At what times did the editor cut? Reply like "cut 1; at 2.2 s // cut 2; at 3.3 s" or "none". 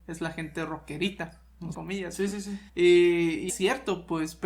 cut 1; at 1.7 s // cut 2; at 2.7 s // cut 3; at 3.5 s

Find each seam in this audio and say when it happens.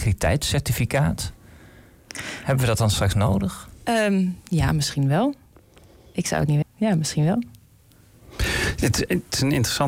cut 1; at 6.6 s

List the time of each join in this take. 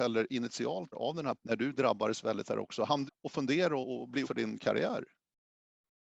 cut 1; at 0.9 s // cut 2; at 1.3 s // cut 3; at 2.4 s // cut 4; at 3.1 s // cut 5; at 3.8 s // cut 6; at 4.2 s

